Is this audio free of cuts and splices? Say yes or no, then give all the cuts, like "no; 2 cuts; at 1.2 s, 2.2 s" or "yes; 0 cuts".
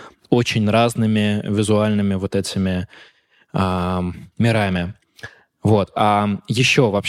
yes; 0 cuts